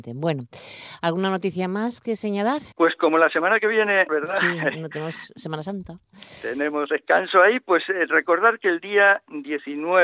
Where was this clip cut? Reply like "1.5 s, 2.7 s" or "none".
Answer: 2.7 s, 4.1 s